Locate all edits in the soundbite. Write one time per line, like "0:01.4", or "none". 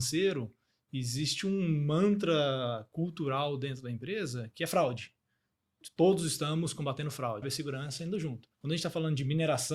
0:07.4
0:08.5